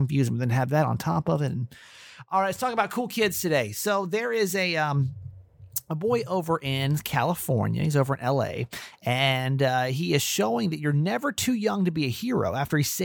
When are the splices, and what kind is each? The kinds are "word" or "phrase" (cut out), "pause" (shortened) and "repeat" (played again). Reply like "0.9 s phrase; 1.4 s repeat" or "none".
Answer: none